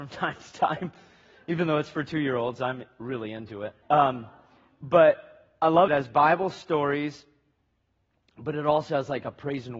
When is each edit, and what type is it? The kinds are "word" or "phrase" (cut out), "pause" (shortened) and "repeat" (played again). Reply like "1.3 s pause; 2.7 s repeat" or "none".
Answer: 3.8 s pause; 5.9 s phrase